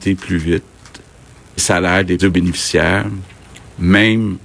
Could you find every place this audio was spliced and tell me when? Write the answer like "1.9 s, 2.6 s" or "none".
1.6 s, 2.2 s